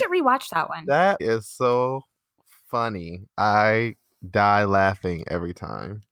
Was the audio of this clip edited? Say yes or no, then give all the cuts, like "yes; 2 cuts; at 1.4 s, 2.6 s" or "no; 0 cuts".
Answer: yes; 2 cuts; at 1.2 s, 3.3 s